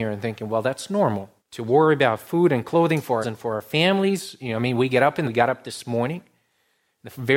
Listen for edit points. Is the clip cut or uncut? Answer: cut